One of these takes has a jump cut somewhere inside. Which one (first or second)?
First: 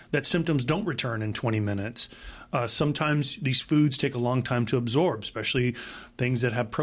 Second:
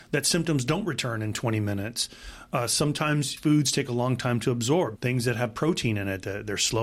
second